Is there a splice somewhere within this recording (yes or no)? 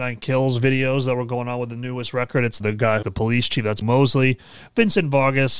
yes